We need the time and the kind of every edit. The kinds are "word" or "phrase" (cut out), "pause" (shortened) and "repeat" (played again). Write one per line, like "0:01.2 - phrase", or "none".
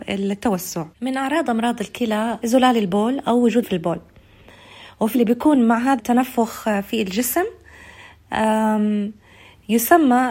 0:00.9 - pause
0:02.4 - word
0:03.6 - word
0:05.1 - word
0:06.0 - word